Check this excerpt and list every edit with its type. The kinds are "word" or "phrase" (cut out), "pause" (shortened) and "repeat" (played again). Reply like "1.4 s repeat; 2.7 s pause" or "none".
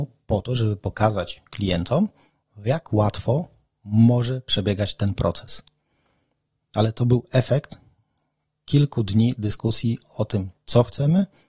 none